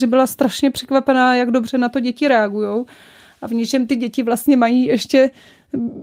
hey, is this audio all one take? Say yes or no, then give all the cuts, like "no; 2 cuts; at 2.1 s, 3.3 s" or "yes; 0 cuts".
yes; 0 cuts